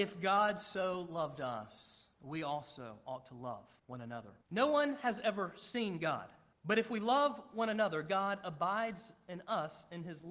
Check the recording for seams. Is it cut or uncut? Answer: cut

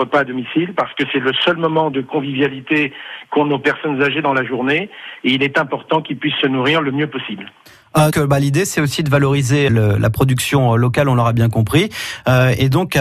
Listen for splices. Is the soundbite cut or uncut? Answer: cut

